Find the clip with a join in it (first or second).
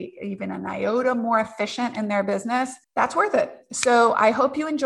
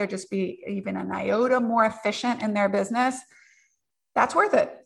first